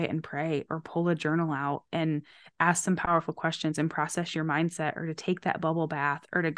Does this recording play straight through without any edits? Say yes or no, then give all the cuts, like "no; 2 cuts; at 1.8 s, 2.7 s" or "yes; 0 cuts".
yes; 0 cuts